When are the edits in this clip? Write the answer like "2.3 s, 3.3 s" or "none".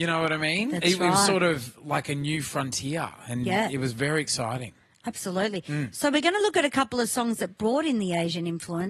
none